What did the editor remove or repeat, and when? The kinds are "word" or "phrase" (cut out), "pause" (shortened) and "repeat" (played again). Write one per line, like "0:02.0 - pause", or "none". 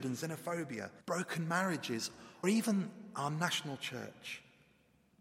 0:01.0 - pause
0:02.4 - phrase

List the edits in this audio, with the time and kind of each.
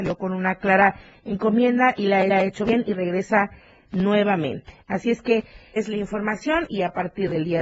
0:02.3 - repeat
0:04.8 - pause
0:05.8 - word

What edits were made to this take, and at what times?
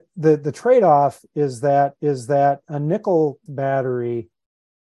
0:02.0 - repeat
0:03.5 - word

